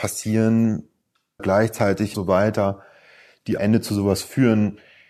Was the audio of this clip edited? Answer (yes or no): yes